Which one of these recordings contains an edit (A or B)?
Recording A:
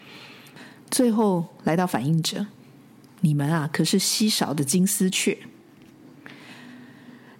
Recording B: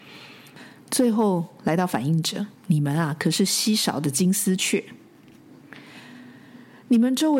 B